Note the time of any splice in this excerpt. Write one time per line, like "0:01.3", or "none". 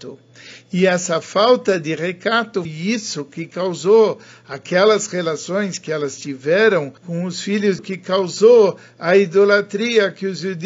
0:02.6
0:07.0
0:07.8

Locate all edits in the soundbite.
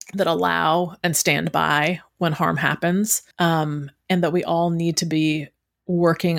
0:03.3

